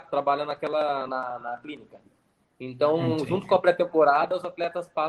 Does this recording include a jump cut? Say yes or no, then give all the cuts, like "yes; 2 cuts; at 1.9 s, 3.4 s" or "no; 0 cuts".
no; 0 cuts